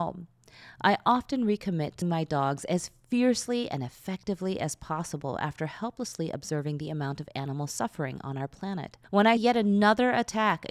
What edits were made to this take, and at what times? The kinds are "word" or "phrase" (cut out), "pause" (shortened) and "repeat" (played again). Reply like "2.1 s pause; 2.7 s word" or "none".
2.0 s word; 9.0 s pause; 9.4 s word